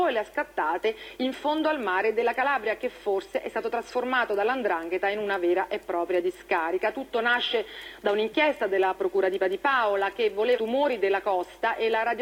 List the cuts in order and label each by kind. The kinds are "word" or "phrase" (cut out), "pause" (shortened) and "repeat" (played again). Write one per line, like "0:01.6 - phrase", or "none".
0:09.4 - repeat
0:10.6 - phrase